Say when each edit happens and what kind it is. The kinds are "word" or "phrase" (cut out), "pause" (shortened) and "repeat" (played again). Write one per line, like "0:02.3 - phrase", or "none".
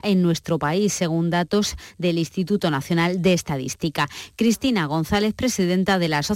none